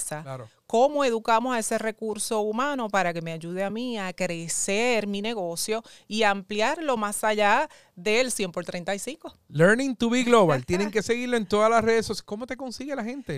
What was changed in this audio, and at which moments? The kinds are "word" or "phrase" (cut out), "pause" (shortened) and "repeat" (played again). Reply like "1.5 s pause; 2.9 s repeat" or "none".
none